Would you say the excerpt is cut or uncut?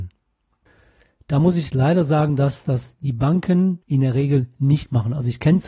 cut